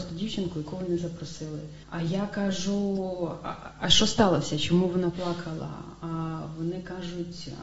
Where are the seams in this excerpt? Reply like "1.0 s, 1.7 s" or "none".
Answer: 1.8 s